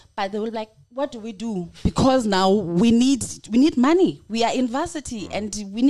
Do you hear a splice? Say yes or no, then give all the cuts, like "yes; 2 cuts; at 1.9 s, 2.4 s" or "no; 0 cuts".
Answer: no; 0 cuts